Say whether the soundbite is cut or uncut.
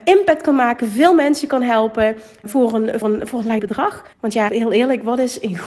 cut